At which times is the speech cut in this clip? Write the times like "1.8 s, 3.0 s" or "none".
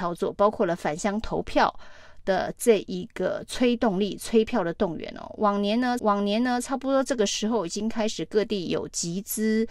6.0 s

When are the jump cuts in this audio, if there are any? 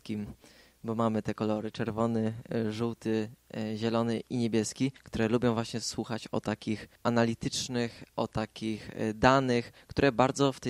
5.0 s, 7.0 s

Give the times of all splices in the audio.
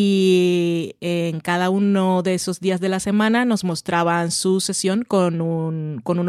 none

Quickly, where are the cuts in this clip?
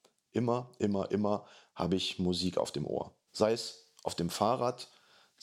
3.3 s

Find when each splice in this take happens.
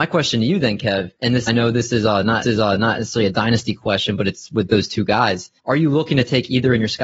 1.2 s, 1.5 s, 2.4 s, 5.6 s

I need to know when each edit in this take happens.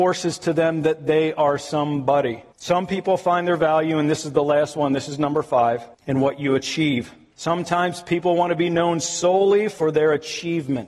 2.5 s, 5.9 s, 7.3 s

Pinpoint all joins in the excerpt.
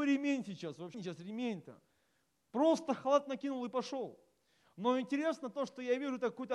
0.9 s

